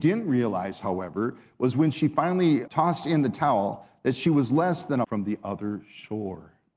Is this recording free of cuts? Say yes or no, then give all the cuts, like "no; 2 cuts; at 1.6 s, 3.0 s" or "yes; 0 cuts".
no; 2 cuts; at 2.7 s, 5.0 s